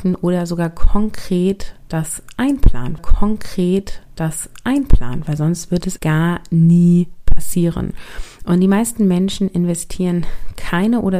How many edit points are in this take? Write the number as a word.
two